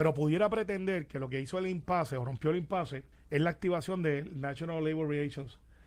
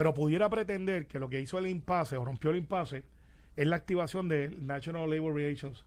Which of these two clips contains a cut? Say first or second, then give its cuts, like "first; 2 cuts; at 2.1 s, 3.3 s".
first; 1 cut; at 3.1 s